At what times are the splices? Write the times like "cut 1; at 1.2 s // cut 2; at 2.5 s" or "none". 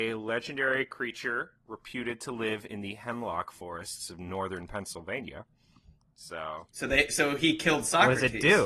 cut 1; at 6.7 s